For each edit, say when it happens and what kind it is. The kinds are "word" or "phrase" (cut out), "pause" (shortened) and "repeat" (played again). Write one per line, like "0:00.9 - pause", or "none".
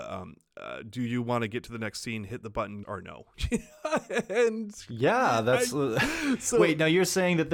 0:02.8 - word